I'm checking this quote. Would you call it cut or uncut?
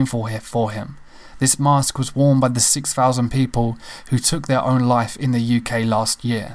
uncut